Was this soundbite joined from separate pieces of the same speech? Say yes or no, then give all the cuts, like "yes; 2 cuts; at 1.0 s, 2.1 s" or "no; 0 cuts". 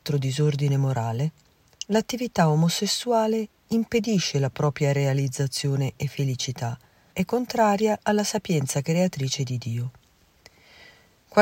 yes; 1 cut; at 7.1 s